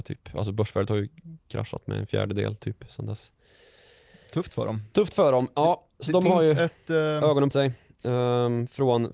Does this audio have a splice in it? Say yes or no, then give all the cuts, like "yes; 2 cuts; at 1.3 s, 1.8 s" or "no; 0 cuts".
yes; 1 cut; at 7.5 s